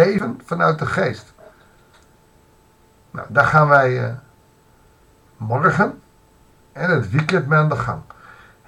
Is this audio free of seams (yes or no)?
yes